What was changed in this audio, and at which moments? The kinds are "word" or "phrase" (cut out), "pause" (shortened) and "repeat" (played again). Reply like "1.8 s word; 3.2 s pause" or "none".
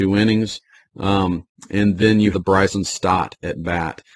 2.3 s word